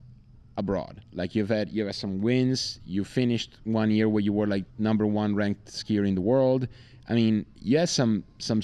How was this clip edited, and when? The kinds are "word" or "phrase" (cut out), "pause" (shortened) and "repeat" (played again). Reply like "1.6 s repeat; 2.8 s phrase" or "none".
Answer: 1.1 s pause; 4.7 s pause

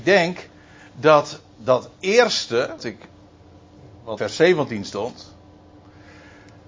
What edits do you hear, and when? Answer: 2.8 s word; 4.2 s word

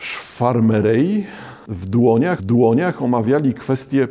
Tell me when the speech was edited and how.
2.4 s repeat

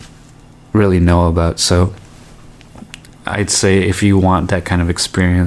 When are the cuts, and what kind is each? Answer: 3.2 s word

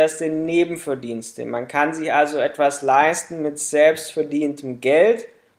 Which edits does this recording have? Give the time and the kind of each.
none

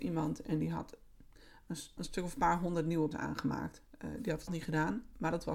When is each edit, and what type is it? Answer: 2.0 s word; 3.1 s word; 4.5 s word

